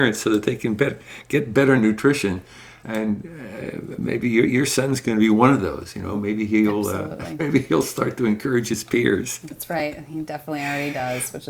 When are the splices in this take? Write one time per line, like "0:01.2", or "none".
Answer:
none